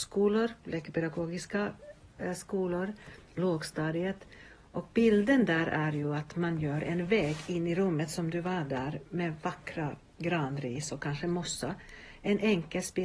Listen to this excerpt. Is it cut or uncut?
uncut